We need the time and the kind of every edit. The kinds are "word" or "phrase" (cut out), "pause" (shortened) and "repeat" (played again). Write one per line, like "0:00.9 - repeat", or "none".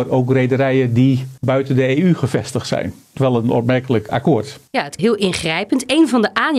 0:01.4 - pause
0:03.2 - phrase
0:04.1 - word
0:04.7 - pause
0:05.0 - phrase